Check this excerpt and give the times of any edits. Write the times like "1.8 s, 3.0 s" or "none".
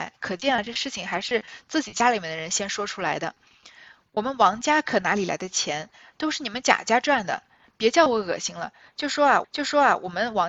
9.4 s